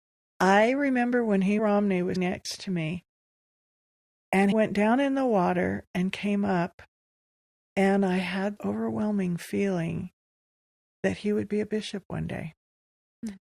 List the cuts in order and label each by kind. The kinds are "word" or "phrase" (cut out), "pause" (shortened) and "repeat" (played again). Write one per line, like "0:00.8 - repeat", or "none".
0:01.6 - phrase
0:02.2 - word
0:04.5 - word
0:08.6 - word